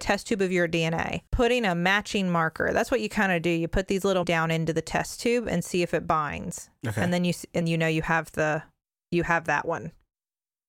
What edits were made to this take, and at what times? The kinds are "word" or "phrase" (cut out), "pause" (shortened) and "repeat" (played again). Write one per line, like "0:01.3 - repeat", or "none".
0:01.3 - pause
0:04.2 - phrase
0:07.6 - word